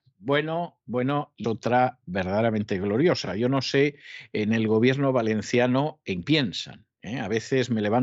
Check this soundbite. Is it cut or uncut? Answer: cut